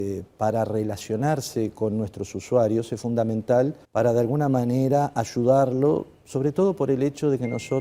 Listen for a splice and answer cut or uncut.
cut